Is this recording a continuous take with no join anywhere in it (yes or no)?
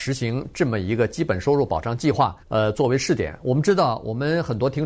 no